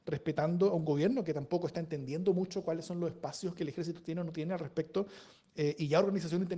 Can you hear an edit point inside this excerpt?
no; 0 cuts

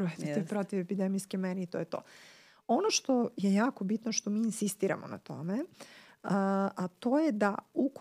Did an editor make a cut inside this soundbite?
no; 0 cuts

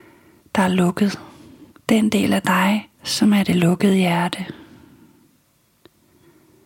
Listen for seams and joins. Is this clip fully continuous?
no; 2 cuts; at 1.7 s, 2.9 s

